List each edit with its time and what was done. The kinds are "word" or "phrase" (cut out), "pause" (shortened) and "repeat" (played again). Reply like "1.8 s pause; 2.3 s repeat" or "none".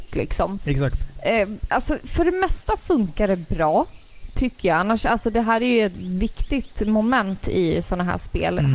none

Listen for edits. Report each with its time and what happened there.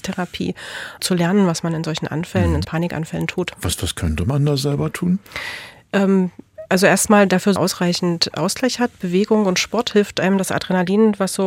1.0 s word; 2.6 s word; 7.6 s phrase

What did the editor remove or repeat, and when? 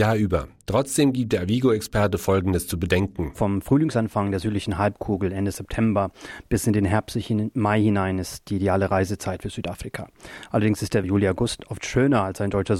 11.0 s phrase

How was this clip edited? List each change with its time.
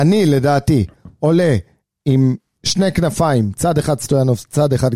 none

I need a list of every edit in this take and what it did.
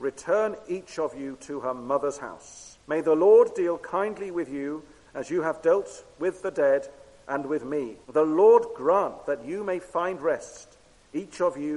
2.8 s pause; 8.0 s pause

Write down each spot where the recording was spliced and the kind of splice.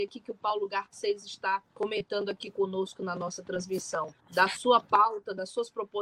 1.7 s pause; 4.2 s pause

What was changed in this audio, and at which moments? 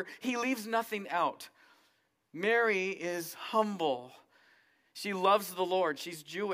none

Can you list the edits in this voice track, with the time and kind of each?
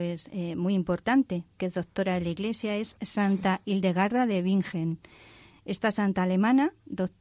1.6 s word

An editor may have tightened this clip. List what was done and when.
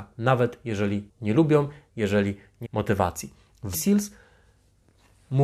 1.1 s word; 1.9 s word; 2.6 s word; 3.7 s word

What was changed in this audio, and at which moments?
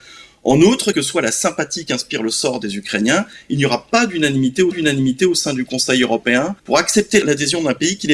0.9 s word; 4.7 s repeat; 6.6 s pause

